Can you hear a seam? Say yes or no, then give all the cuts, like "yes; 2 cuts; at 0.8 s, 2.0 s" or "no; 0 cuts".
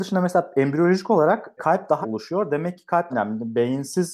yes; 3 cuts; at 1.6 s, 2.0 s, 3.1 s